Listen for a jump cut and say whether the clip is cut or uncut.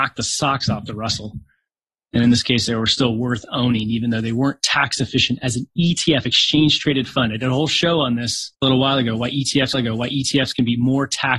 cut